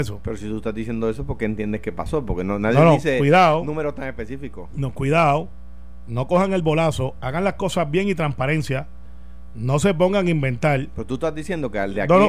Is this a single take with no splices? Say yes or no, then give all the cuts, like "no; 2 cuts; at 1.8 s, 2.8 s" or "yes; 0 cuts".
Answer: yes; 0 cuts